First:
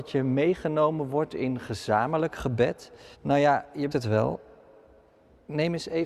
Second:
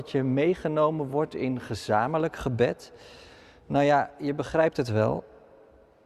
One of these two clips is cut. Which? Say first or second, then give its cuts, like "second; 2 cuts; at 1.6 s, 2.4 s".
first; 2 cuts; at 3.1 s, 3.9 s